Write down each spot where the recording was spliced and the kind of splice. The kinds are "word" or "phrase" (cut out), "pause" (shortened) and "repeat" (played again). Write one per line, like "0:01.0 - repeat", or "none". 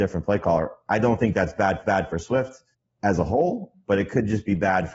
0:01.8 - repeat
0:02.7 - pause